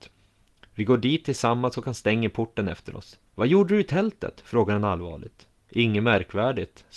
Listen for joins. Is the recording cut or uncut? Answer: cut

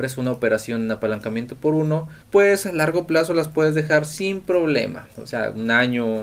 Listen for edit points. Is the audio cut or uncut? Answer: cut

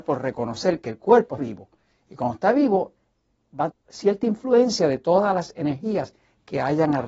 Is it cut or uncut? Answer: cut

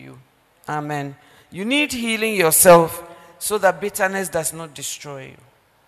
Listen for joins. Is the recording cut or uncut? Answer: uncut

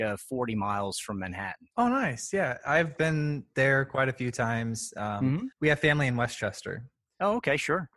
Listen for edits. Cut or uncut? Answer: cut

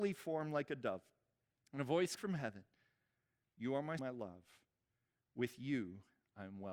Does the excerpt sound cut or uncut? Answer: cut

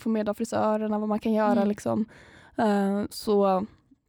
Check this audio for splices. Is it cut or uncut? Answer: uncut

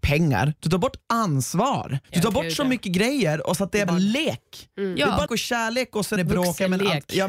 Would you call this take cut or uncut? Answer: cut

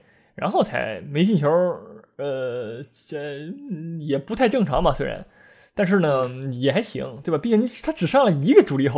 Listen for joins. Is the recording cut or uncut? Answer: uncut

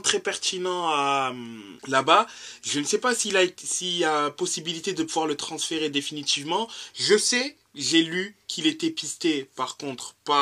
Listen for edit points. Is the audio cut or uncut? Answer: cut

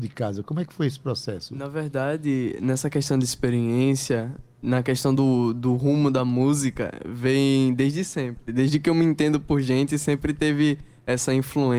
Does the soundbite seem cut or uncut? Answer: uncut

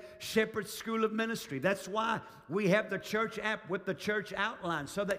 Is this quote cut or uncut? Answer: uncut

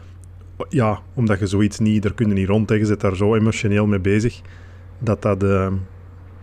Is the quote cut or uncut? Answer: uncut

